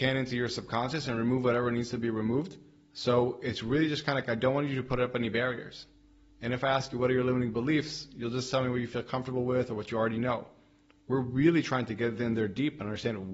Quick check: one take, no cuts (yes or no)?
yes